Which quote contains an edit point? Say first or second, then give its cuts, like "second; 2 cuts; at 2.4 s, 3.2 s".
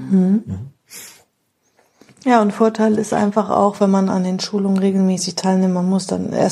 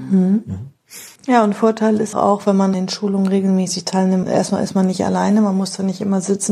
second; 4 cuts; at 1.2 s, 2.1 s, 2.7 s, 4.2 s